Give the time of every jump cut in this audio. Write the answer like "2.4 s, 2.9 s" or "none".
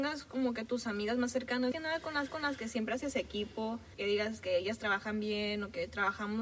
1.7 s, 2.3 s, 3.9 s

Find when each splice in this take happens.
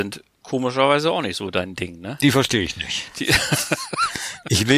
none

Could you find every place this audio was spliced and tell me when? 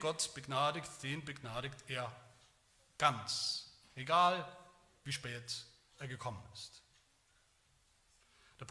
none

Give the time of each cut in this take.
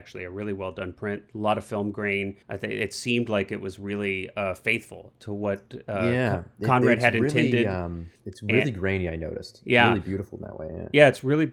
2.4 s, 8.1 s

